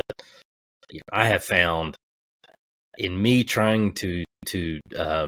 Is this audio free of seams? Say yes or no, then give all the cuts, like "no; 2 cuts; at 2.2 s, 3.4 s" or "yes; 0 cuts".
yes; 0 cuts